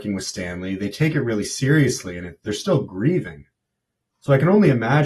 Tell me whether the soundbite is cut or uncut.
uncut